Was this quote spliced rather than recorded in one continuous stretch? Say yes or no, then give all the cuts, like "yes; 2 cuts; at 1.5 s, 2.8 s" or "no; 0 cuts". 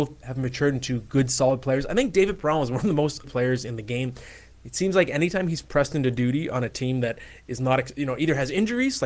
yes; 1 cut; at 3.2 s